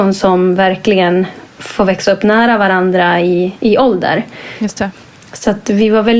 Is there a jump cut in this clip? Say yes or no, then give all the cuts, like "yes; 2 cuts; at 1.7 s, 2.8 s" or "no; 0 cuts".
no; 0 cuts